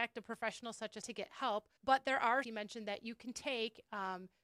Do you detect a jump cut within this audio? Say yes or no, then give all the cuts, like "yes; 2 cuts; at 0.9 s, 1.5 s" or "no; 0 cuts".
yes; 3 cuts; at 1.0 s, 1.8 s, 2.4 s